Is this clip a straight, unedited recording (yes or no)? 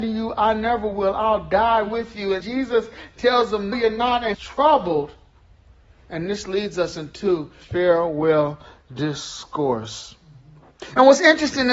no